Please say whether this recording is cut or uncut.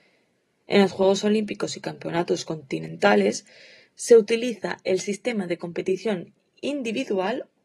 uncut